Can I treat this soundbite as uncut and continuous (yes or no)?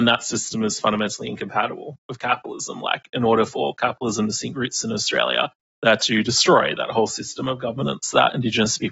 yes